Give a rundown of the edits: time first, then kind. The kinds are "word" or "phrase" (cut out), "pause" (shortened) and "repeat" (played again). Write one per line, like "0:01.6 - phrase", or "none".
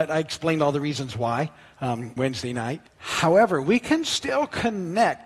0:02.2 - word
0:02.9 - pause